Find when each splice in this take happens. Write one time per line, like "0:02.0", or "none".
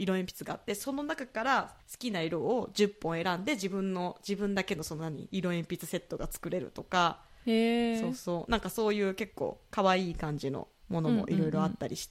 0:01.8